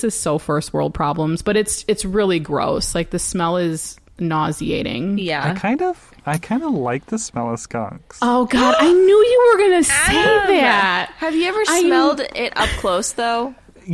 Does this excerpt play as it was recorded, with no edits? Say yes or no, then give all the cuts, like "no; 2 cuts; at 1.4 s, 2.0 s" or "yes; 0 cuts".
yes; 0 cuts